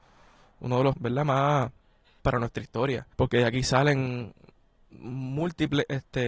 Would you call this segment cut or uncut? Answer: cut